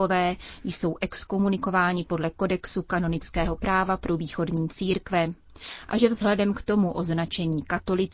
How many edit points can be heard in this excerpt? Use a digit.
0